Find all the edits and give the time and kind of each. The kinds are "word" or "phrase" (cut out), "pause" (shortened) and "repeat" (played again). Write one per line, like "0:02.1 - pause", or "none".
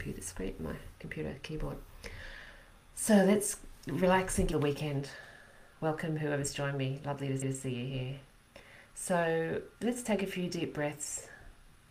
0:04.5 - phrase
0:07.4 - repeat
0:09.7 - pause